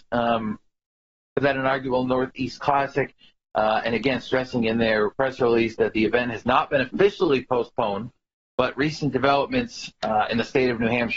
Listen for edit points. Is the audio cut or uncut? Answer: uncut